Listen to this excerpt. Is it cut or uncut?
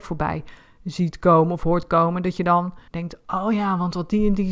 cut